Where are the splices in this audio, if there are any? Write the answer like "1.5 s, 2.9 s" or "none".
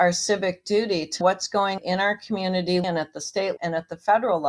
1.2 s, 1.8 s, 2.8 s, 3.6 s